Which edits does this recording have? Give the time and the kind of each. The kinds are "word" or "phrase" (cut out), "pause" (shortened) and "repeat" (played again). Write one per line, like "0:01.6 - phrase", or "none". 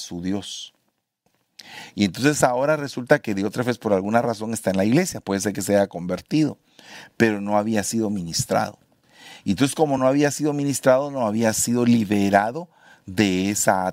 none